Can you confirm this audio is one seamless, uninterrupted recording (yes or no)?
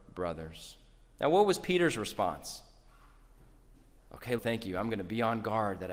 no